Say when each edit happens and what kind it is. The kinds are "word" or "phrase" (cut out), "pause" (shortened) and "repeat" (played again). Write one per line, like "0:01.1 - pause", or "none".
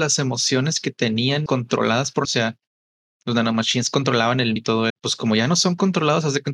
0:01.5 - word
0:02.2 - word
0:04.6 - word
0:04.9 - word